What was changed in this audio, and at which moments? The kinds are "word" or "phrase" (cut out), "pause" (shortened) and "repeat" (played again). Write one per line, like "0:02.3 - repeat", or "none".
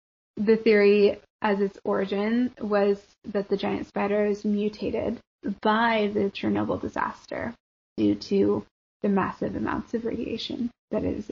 none